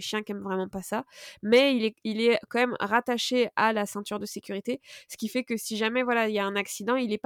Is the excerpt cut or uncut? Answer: uncut